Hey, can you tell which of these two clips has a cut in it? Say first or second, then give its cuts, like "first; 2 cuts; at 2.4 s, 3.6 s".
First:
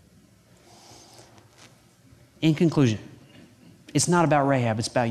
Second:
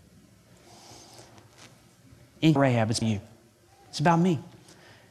second; 2 cuts; at 2.6 s, 3.0 s